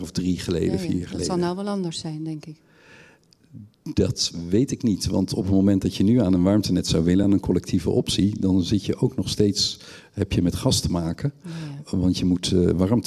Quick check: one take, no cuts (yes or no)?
yes